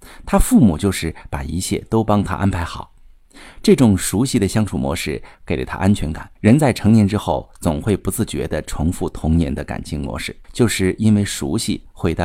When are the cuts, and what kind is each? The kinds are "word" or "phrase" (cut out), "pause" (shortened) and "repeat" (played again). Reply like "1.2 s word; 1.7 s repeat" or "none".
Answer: 6.4 s pause; 10.4 s pause